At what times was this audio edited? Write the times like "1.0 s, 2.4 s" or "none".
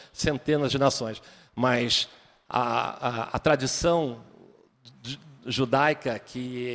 none